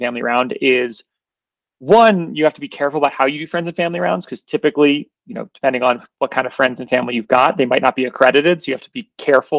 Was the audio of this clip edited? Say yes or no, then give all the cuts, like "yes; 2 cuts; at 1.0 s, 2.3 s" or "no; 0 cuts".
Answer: no; 0 cuts